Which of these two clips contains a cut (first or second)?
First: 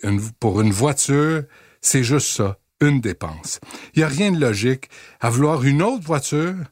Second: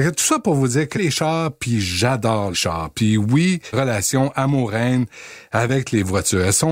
second